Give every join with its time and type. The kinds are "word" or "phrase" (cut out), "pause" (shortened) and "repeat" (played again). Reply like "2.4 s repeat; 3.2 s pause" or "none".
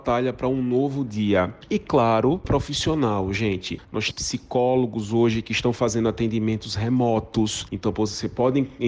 2.4 s word; 4.1 s word